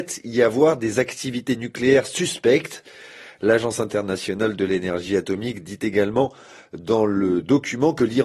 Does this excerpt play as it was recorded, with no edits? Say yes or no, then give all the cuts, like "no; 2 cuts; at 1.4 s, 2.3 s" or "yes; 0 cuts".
yes; 0 cuts